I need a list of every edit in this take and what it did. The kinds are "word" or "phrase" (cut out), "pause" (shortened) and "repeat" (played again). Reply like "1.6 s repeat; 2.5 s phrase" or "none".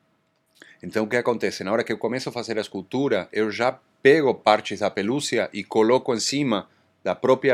none